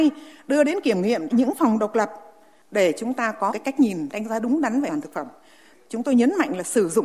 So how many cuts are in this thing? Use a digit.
4